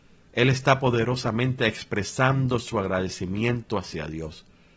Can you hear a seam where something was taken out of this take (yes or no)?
no